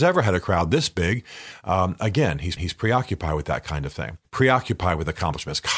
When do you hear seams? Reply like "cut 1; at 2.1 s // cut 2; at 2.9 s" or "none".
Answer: cut 1; at 2.6 s // cut 2; at 4.2 s